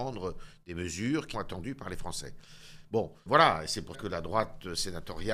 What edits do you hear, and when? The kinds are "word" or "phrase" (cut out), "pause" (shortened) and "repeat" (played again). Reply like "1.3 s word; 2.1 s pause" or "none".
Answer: 1.3 s word; 3.3 s word; 3.9 s word